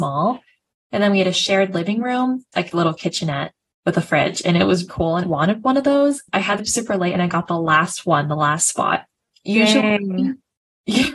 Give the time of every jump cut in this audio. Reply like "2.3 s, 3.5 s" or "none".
2.5 s, 4.9 s, 5.2 s, 6.6 s